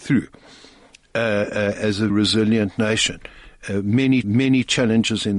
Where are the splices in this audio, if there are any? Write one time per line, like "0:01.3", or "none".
0:02.1
0:04.2